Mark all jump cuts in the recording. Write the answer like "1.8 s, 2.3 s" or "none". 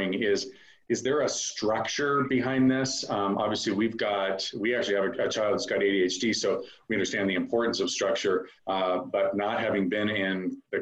8.6 s